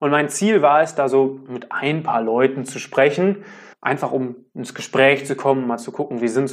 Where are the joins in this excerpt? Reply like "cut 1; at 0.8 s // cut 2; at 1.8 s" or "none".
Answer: cut 1; at 3.7 s